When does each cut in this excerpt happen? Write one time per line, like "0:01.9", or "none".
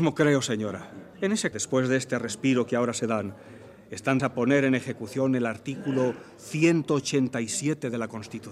0:01.1
0:01.5
0:04.2